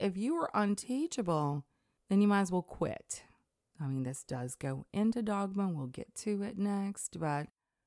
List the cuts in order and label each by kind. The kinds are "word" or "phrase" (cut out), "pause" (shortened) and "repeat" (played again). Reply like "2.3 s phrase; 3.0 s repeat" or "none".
none